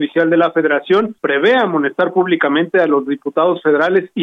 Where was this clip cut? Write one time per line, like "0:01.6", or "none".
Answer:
0:01.2